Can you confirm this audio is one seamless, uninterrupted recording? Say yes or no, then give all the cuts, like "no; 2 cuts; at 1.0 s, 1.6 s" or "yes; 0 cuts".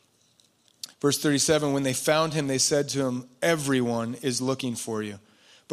no; 1 cut; at 0.9 s